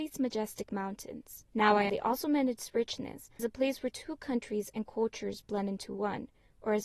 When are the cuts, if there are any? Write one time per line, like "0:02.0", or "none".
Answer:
0:01.5
0:01.9
0:03.4